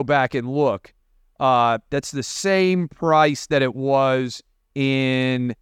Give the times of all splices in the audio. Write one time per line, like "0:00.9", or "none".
none